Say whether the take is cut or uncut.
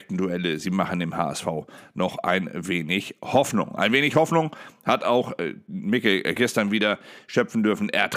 cut